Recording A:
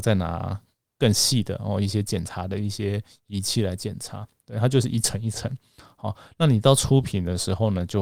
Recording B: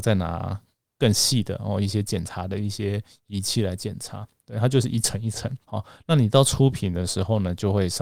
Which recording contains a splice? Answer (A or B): B